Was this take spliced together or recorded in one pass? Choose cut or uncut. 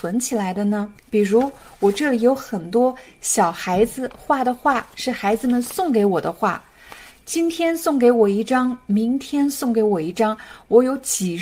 cut